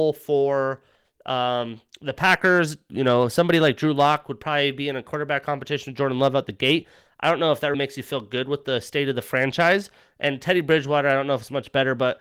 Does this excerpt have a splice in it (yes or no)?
yes